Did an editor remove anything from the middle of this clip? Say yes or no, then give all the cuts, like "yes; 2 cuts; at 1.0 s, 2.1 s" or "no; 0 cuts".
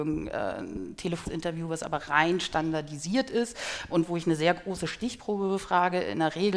yes; 2 cuts; at 1.2 s, 3.9 s